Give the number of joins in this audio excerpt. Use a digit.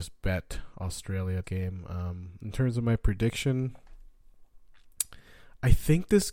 1